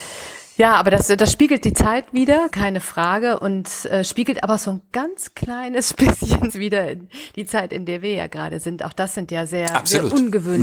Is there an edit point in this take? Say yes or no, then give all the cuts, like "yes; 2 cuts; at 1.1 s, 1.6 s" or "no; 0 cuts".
yes; 2 cuts; at 2.5 s, 6.5 s